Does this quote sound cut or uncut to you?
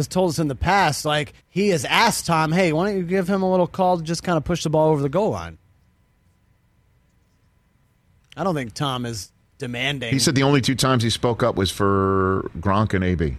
cut